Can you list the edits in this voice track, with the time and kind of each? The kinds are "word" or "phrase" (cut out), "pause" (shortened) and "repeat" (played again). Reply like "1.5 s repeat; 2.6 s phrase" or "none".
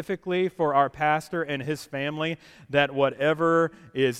none